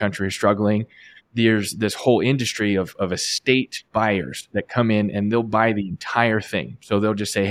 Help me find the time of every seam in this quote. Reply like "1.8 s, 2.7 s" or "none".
1.2 s, 3.9 s